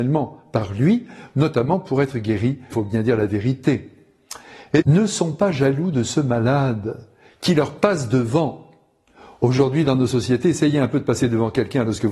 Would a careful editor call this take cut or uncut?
cut